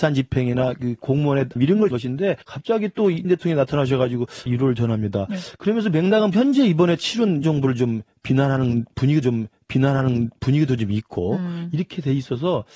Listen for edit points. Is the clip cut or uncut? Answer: cut